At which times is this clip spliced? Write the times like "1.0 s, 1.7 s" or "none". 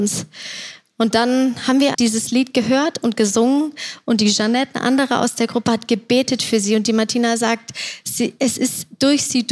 1.9 s